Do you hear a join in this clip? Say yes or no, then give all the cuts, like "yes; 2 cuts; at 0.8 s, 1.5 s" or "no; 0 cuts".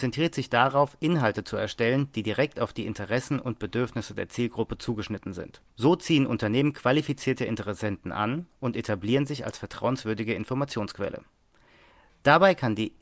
yes; 1 cut; at 5.7 s